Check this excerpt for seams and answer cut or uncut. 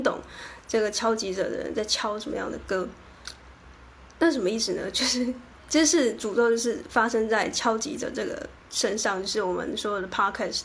cut